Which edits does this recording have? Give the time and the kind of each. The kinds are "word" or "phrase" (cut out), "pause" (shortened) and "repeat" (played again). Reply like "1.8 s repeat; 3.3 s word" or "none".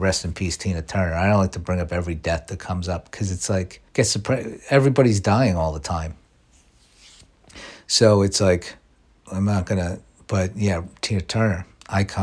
3.9 s pause